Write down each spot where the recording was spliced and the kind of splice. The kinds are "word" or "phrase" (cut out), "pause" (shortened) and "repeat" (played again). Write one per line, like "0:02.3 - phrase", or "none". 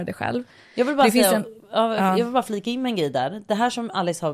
none